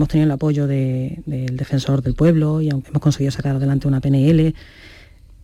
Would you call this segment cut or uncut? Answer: cut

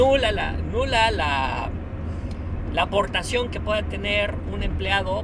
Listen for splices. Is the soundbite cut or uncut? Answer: uncut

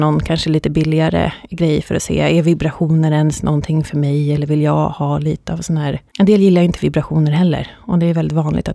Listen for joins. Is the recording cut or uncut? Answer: cut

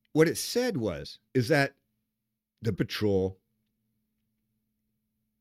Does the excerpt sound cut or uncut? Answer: cut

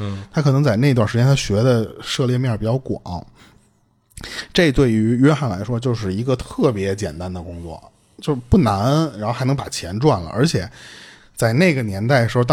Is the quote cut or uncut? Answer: uncut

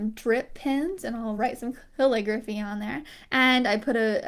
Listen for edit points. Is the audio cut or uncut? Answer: uncut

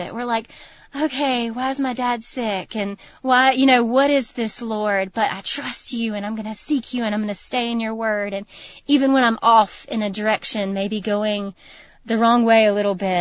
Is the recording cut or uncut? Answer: uncut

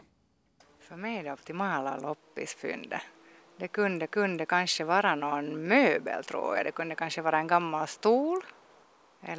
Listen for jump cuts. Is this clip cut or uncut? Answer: cut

